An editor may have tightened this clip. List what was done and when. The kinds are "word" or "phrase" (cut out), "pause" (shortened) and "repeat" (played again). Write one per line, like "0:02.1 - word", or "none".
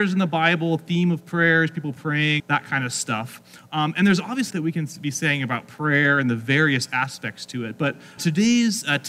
0:02.4 - word
0:04.5 - phrase
0:08.2 - word